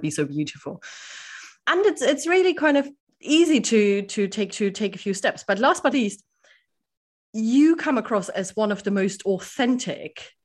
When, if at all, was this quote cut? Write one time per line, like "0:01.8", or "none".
0:03.0
0:04.5
0:05.9